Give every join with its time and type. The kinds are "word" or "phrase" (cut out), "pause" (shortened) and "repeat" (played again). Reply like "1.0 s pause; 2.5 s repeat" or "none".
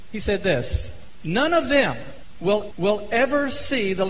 2.7 s repeat